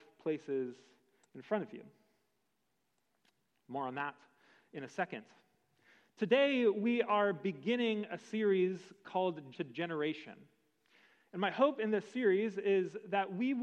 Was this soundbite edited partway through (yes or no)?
yes